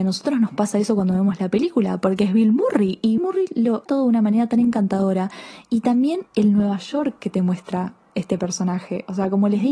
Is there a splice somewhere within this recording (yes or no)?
yes